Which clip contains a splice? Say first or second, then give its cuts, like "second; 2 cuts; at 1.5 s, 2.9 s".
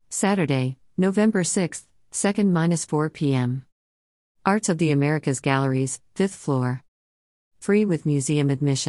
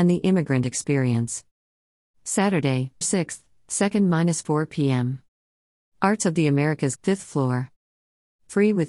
second; 2 cuts; at 3.0 s, 7.0 s